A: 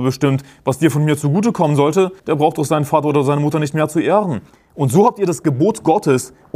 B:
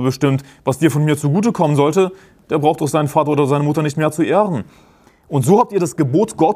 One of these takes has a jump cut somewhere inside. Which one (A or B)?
A